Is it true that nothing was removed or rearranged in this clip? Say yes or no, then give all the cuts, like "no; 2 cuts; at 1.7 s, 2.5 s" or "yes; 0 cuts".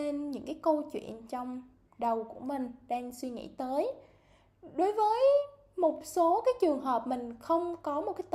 yes; 0 cuts